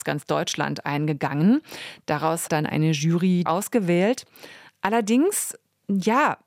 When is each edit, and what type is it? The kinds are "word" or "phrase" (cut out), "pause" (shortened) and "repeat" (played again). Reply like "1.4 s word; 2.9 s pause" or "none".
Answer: 2.5 s word; 3.5 s phrase